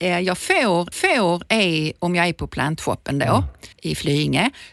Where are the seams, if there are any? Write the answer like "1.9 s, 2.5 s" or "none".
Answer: 0.9 s, 3.7 s

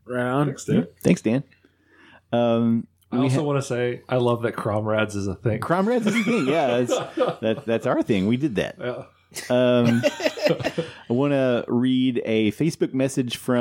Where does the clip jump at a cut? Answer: none

